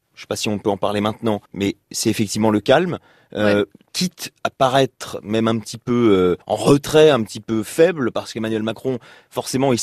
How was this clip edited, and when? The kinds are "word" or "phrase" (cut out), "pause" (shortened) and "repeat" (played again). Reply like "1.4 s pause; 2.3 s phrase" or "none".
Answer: 1.4 s pause; 6.4 s pause